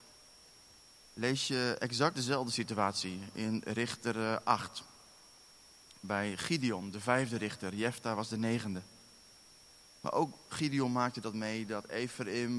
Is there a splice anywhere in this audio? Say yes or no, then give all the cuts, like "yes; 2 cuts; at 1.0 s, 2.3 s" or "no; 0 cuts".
no; 0 cuts